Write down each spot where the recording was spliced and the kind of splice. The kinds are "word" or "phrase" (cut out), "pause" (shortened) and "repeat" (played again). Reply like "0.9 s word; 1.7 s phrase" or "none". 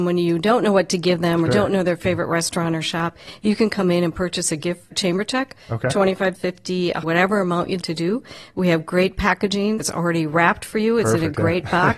1.5 s word; 4.9 s word; 6.3 s word; 7.0 s word; 7.8 s word; 9.8 s word